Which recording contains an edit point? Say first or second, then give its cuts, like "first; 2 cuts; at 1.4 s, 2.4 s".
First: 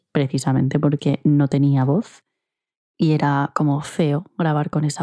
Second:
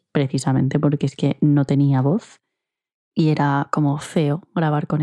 first; 1 cut; at 1.0 s